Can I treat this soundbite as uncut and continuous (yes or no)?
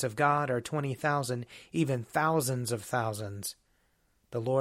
yes